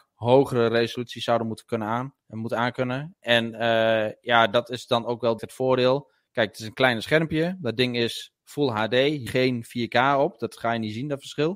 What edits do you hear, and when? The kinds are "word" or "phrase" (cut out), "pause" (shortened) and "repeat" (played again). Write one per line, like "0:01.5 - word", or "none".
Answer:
0:02.2 - pause
0:05.4 - word
0:09.3 - phrase